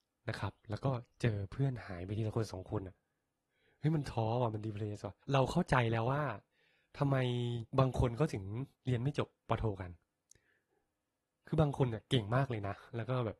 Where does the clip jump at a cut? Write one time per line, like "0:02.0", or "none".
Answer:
0:05.2
0:07.7
0:08.7
0:09.4